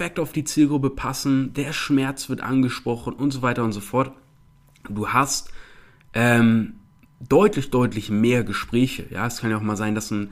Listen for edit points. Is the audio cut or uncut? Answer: uncut